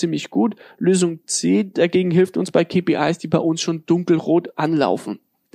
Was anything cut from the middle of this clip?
no; 0 cuts

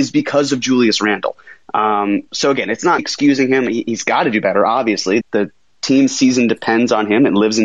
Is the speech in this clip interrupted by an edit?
yes; 2 cuts; at 3.0 s, 5.2 s

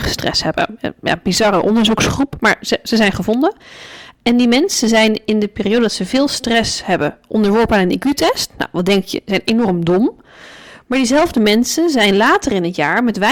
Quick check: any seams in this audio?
no; 0 cuts

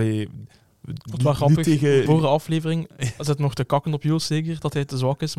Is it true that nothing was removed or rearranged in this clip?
no; 1 cut; at 2.1 s

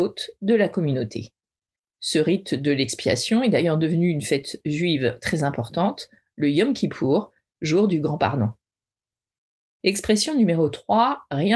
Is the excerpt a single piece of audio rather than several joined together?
yes; 0 cuts

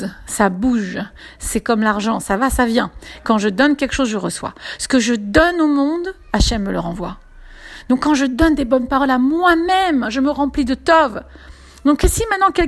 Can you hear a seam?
no; 0 cuts

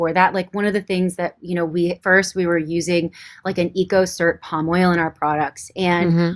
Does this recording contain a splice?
no; 0 cuts

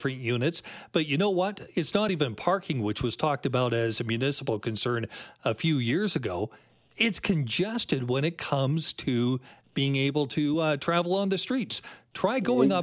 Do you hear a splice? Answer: no; 0 cuts

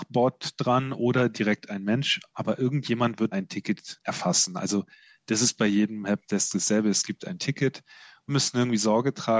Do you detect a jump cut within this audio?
yes; 2 cuts; at 3.3 s, 8.3 s

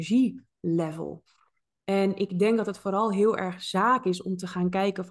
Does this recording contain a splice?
no; 0 cuts

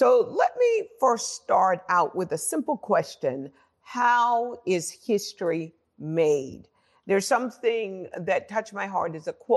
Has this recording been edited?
no; 0 cuts

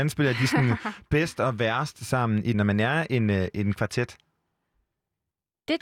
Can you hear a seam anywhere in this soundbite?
yes; 1 cut; at 2.5 s

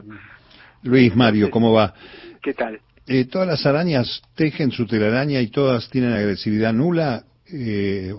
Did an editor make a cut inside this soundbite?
no; 0 cuts

